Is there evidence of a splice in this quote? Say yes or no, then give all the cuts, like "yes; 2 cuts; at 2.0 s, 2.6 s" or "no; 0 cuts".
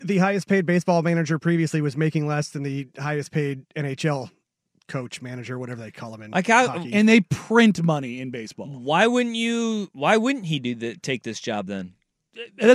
no; 0 cuts